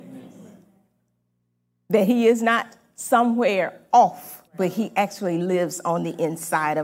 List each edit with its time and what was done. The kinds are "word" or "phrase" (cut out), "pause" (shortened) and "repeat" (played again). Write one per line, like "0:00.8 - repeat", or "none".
0:04.5 - pause